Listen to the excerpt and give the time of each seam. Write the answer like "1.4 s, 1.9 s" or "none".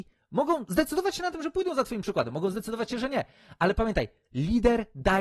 none